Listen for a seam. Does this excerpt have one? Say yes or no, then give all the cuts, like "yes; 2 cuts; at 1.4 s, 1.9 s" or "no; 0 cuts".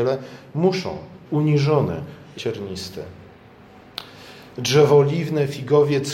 yes; 2 cuts; at 1.3 s, 2.4 s